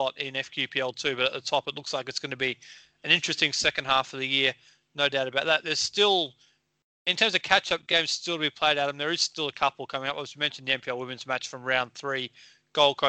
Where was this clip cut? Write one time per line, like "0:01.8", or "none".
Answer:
none